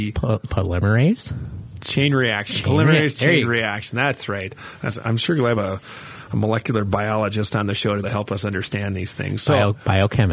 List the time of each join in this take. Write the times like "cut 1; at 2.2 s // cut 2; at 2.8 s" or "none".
cut 1; at 5.0 s // cut 2; at 5.6 s // cut 3; at 8.0 s